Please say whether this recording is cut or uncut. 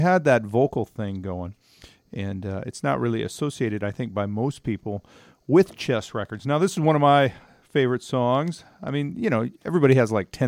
uncut